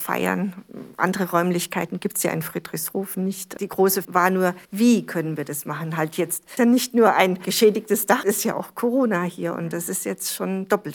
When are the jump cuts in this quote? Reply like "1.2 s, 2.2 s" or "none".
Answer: 4.0 s, 4.6 s, 6.6 s, 8.2 s